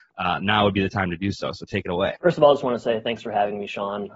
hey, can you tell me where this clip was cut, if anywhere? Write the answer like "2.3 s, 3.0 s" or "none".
none